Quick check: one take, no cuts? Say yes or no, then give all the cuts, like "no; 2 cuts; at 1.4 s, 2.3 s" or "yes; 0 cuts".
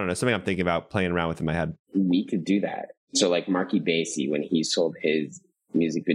no; 1 cut; at 1.8 s